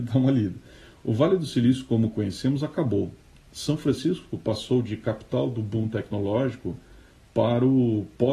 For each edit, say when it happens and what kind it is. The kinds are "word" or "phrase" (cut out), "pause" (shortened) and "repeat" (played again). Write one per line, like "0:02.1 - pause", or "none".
none